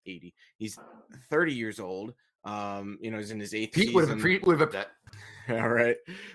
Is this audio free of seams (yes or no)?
no